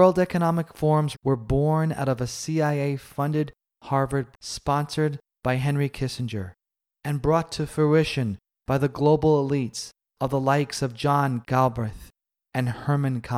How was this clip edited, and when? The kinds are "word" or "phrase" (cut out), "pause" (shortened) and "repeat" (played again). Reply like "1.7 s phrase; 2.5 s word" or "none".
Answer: 1.1 s word; 4.3 s word; 11.4 s word